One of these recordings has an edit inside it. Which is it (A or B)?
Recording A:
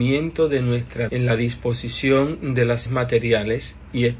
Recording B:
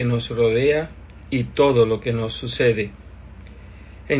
A